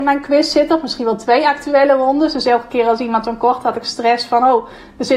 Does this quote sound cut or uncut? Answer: uncut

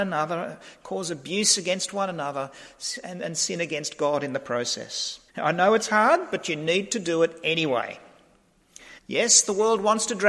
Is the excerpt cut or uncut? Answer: cut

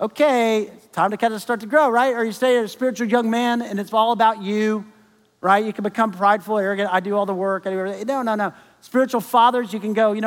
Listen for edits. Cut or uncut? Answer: uncut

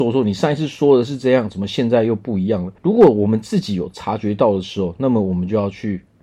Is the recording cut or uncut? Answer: cut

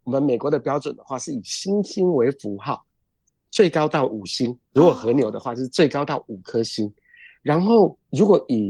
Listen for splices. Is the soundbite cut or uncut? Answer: cut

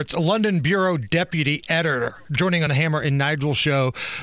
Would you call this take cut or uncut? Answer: cut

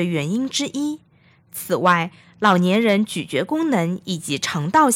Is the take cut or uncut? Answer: uncut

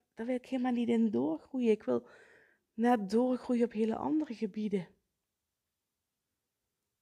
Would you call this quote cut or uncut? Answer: uncut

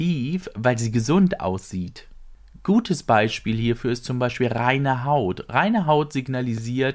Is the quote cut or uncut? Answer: uncut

